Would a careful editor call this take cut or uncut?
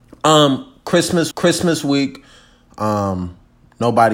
cut